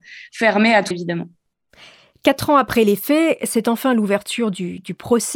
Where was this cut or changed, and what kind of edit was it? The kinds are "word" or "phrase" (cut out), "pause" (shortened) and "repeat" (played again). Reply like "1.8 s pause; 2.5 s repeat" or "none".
0.9 s word

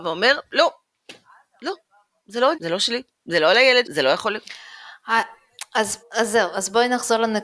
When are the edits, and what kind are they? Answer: 2.5 s word; 3.8 s word; 6.0 s word

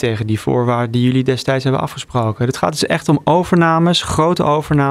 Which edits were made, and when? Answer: none

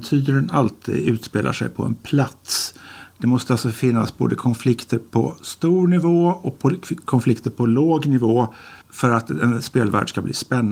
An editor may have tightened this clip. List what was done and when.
8.8 s pause

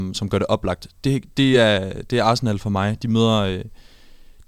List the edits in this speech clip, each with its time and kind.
none

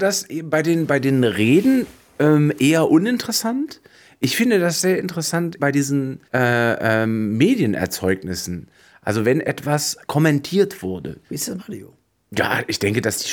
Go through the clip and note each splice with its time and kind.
5.6 s word; 6.3 s pause; 11.2 s pause; 11.6 s word

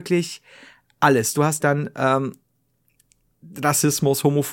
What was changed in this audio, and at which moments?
1.6 s word

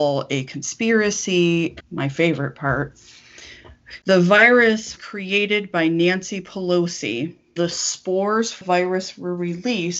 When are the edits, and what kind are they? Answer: 1.8 s word; 4.0 s pause; 5.0 s word; 7.6 s word; 8.6 s word

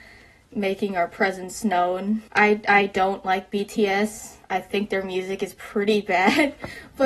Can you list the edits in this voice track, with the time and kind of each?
2.3 s pause; 4.4 s pause

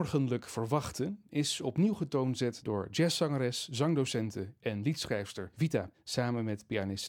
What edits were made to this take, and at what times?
5.9 s word

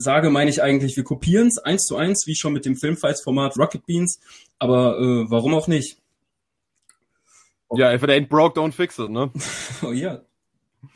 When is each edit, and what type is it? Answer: 3.6 s word

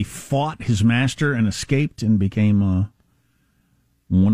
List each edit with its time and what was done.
none

